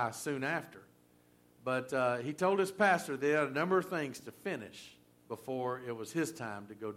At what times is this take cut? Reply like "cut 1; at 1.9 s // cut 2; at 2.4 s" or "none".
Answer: cut 1; at 5.1 s